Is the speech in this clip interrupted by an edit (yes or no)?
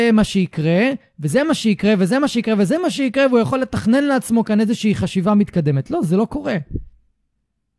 no